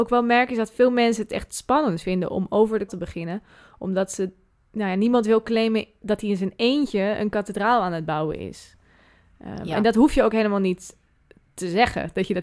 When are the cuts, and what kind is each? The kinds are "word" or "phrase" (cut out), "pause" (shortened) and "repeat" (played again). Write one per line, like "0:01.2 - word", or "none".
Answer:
0:02.9 - word